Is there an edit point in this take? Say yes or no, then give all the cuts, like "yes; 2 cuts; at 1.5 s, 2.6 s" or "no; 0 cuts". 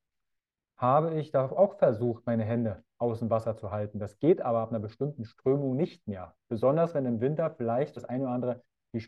yes; 1 cut; at 8.0 s